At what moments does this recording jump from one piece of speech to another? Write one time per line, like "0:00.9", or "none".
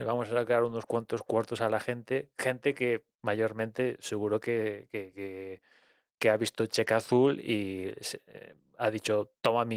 none